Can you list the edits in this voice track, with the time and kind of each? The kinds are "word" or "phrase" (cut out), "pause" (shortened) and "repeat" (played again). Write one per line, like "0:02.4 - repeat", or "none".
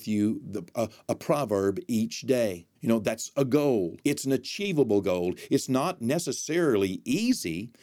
0:02.7 - pause
0:04.0 - pause